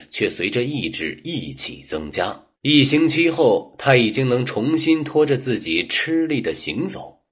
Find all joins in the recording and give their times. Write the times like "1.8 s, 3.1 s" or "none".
2.6 s